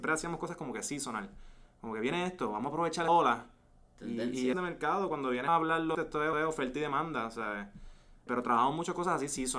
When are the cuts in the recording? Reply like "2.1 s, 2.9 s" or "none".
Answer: 3.1 s, 4.5 s, 5.5 s, 5.9 s, 6.3 s, 8.3 s